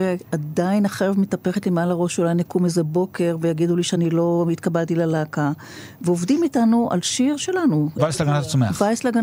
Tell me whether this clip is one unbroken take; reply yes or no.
no